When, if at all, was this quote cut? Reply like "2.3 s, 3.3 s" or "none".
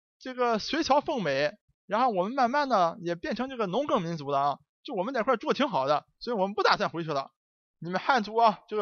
none

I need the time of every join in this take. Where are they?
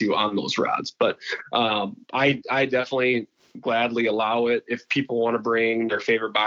none

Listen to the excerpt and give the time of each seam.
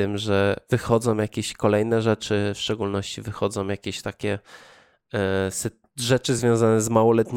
none

